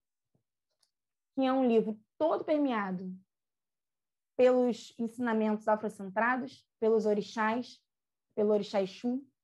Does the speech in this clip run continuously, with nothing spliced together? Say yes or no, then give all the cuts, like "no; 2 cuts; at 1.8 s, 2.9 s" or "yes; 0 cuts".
no; 1 cut; at 6.7 s